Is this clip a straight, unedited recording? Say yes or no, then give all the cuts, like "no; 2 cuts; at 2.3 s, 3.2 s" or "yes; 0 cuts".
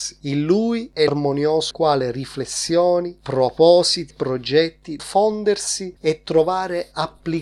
no; 4 cuts; at 1.1 s, 1.7 s, 4.1 s, 5.0 s